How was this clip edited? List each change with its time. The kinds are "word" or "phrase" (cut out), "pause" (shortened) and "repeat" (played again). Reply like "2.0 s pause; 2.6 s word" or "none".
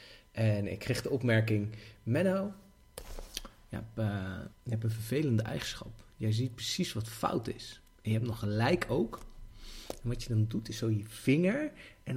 4.5 s pause